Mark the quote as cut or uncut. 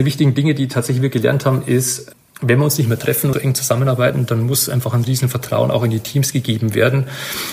cut